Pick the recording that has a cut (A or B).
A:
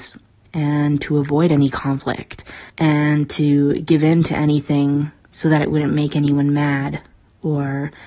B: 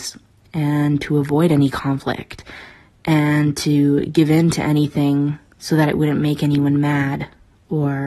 A